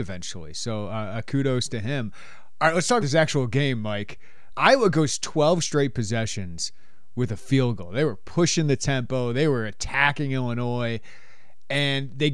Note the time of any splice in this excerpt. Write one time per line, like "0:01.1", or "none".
0:03.0
0:04.5